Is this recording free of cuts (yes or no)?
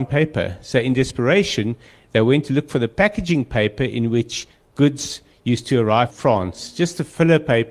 no